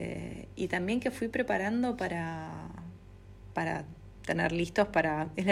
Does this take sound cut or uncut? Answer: uncut